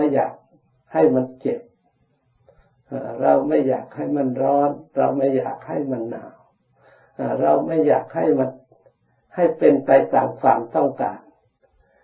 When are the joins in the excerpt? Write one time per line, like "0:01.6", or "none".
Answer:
none